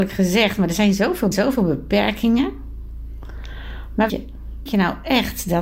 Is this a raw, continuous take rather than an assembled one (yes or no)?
no